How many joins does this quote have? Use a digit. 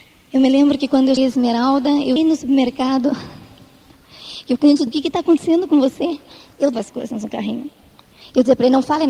4